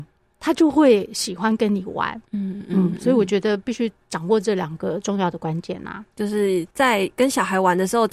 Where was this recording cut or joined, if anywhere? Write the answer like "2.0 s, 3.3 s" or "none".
2.2 s, 6.1 s, 6.7 s